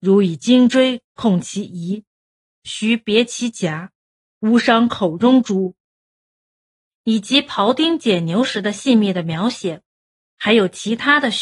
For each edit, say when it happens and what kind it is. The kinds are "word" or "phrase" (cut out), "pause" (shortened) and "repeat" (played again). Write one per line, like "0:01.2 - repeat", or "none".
none